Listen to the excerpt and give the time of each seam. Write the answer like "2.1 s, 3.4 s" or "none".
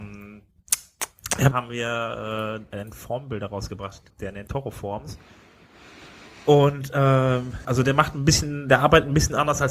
1.5 s, 4.1 s, 4.5 s, 7.6 s